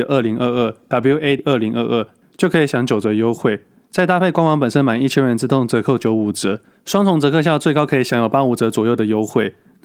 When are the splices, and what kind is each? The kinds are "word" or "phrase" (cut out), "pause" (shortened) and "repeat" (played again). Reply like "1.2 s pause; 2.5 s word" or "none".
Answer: 1.4 s word